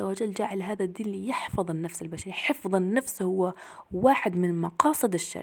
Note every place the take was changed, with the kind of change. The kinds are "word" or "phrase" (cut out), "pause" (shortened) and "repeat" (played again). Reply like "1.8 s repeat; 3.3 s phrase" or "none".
none